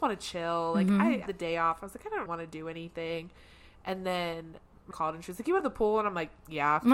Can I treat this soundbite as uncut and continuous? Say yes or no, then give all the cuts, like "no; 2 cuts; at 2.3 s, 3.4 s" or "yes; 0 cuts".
no; 4 cuts; at 1.3 s, 2.3 s, 4.9 s, 5.6 s